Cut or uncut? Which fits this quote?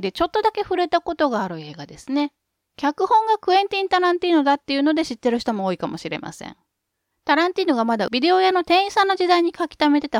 uncut